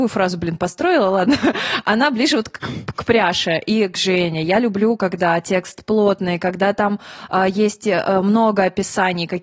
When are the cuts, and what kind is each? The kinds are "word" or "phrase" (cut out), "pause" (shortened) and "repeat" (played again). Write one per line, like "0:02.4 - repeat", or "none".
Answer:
none